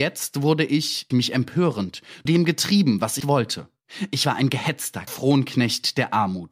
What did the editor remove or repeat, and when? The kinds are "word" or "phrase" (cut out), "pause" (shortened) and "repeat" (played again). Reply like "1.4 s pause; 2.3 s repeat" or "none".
1.1 s word; 2.3 s word; 3.2 s word; 5.1 s word